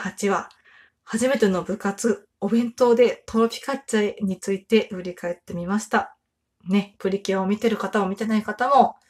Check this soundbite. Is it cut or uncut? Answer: cut